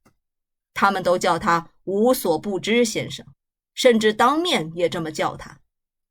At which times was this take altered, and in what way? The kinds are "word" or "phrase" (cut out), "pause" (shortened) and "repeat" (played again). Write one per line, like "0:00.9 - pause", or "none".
0:03.3 - pause